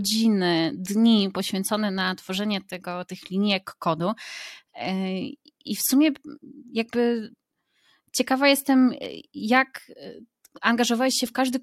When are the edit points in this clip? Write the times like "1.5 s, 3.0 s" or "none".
none